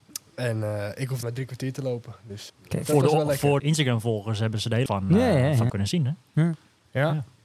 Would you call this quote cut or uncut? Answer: cut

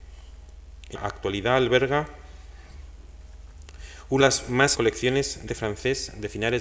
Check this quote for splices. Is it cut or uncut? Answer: cut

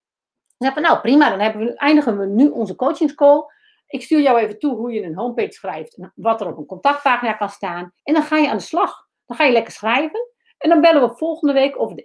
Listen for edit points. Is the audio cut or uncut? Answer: cut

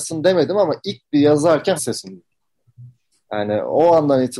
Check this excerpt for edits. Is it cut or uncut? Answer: cut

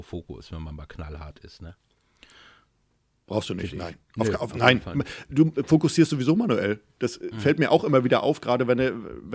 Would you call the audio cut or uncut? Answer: uncut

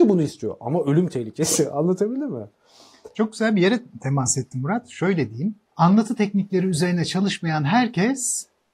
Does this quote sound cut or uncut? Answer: cut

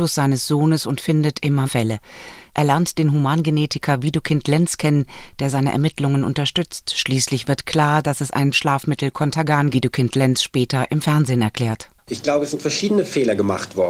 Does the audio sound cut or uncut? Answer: cut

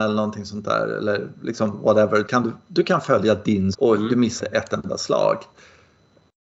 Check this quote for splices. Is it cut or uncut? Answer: cut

